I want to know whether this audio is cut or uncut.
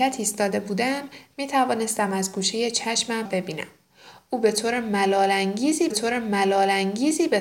cut